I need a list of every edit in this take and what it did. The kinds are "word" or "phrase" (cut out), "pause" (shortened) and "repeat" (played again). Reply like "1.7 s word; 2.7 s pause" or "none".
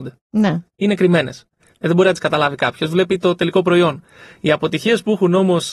none